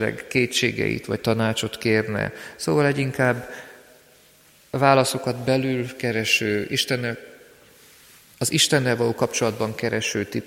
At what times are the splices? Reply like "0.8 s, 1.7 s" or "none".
none